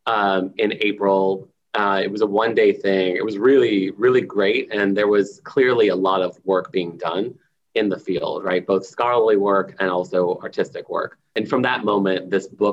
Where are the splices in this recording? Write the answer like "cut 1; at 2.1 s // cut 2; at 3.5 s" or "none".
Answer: none